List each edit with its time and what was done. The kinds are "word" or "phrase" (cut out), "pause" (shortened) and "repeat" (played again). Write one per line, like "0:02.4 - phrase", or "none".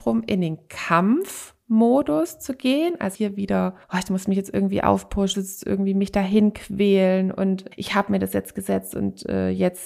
0:03.1 - word
0:03.8 - pause
0:05.3 - phrase
0:07.7 - word